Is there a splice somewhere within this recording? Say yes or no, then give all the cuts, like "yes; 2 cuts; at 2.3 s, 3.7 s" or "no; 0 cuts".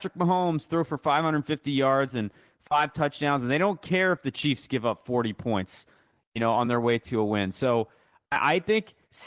no; 0 cuts